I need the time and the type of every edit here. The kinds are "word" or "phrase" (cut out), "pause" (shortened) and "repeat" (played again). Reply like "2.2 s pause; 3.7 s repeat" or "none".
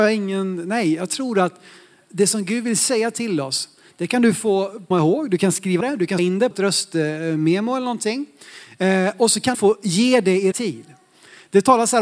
4.9 s word; 5.8 s word; 6.2 s word; 6.5 s word; 9.5 s word; 10.5 s word